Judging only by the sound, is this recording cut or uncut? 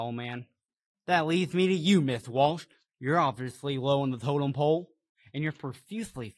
uncut